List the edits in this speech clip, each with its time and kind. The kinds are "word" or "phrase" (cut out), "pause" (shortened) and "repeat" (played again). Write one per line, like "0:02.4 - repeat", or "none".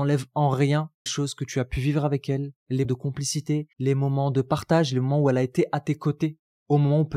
0:01.1 - phrase
0:02.8 - word
0:03.7 - pause